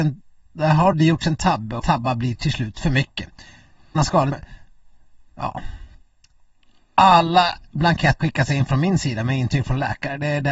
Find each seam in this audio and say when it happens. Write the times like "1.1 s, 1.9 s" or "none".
0.9 s, 1.8 s, 4.0 s, 4.3 s, 8.2 s

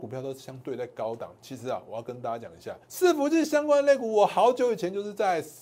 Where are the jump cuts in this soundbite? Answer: 2.8 s

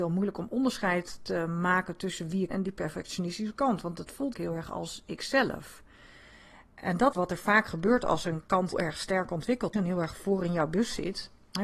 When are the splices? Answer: 2.5 s, 4.3 s, 7.1 s, 8.7 s, 9.7 s

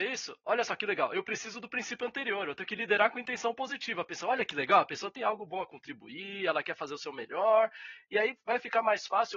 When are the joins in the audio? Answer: none

